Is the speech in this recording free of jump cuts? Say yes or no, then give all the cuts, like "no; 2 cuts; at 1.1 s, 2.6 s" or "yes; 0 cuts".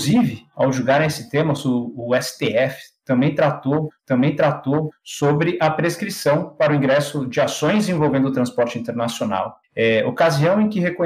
no; 2 cuts; at 4.0 s, 9.6 s